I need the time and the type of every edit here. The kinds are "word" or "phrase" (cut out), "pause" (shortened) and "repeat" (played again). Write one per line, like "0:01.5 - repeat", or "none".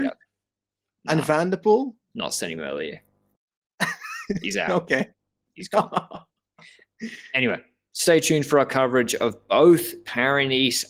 none